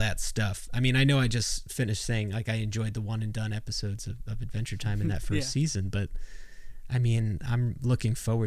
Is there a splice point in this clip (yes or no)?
no